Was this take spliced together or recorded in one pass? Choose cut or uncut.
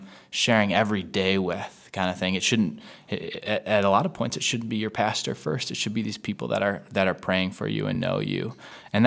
uncut